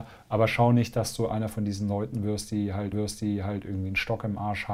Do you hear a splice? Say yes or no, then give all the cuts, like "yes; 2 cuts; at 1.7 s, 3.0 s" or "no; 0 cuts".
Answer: yes; 1 cut; at 2.9 s